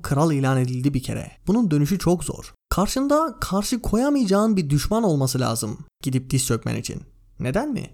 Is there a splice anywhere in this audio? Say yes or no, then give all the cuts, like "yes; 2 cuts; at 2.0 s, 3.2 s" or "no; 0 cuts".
yes; 2 cuts; at 1.4 s, 2.6 s